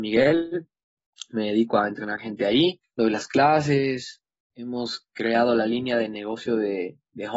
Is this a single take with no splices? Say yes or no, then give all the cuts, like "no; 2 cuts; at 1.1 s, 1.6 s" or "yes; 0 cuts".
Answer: yes; 0 cuts